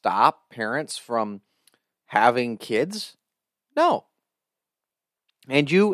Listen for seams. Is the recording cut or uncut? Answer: uncut